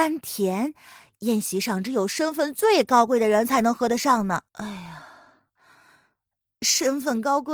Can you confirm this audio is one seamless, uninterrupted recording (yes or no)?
no